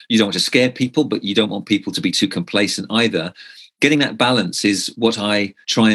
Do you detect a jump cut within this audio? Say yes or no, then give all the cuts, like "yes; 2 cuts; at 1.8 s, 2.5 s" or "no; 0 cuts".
no; 0 cuts